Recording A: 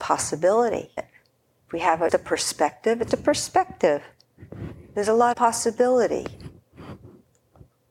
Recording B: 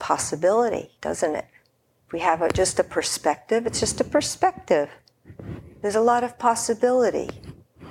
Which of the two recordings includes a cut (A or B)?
A